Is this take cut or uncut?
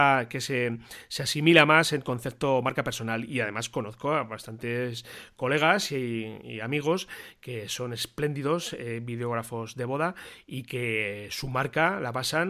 uncut